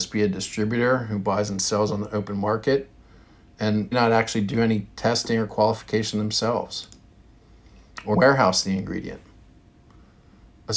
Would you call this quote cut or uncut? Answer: cut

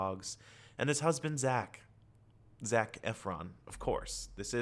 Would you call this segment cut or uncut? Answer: uncut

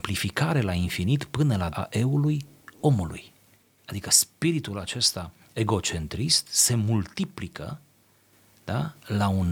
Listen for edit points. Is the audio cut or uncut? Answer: cut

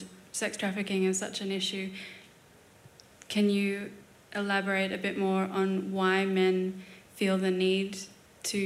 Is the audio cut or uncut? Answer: uncut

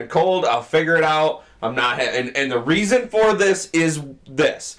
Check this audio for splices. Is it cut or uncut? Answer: uncut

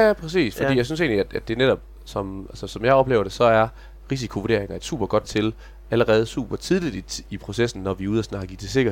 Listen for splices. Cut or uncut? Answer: cut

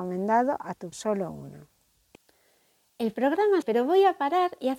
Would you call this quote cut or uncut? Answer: cut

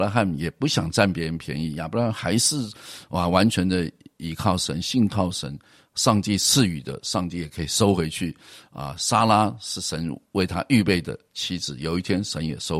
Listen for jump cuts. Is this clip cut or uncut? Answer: uncut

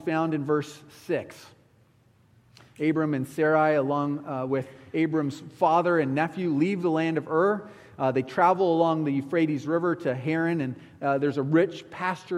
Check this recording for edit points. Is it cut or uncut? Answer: uncut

